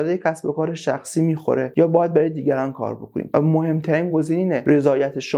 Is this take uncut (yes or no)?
yes